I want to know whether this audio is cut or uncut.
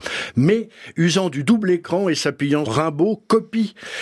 cut